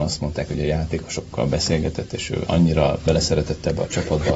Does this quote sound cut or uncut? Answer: uncut